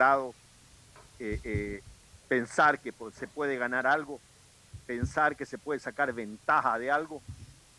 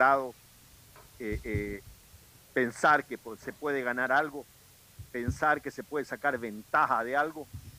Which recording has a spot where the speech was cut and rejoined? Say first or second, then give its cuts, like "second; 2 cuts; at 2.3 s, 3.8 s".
first; 1 cut; at 2.2 s